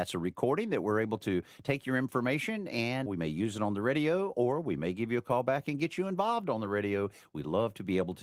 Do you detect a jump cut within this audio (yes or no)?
yes